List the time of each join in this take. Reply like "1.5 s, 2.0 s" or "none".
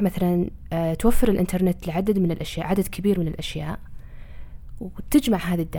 none